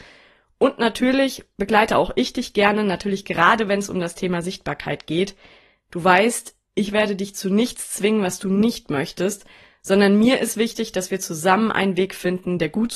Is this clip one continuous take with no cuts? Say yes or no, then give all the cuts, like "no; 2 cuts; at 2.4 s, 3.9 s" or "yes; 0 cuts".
yes; 0 cuts